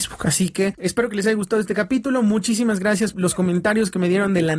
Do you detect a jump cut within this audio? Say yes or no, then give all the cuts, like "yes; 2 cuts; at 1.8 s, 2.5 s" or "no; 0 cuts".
yes; 1 cut; at 3.1 s